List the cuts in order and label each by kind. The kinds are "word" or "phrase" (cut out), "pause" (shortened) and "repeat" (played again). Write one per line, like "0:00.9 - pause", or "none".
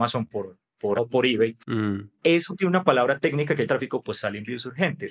0:01.0 - word
0:01.6 - pause
0:03.7 - word